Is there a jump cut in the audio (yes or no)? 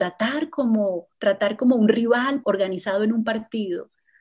yes